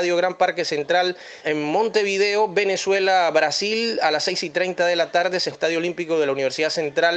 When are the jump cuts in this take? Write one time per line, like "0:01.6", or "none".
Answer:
0:01.4
0:05.5